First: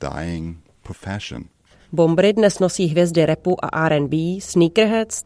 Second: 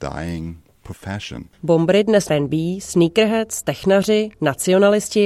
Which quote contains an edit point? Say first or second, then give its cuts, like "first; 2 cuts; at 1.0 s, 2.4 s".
second; 2 cuts; at 1.5 s, 2.3 s